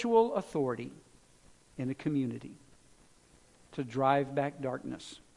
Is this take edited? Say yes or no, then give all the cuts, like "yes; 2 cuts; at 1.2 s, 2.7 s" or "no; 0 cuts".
no; 0 cuts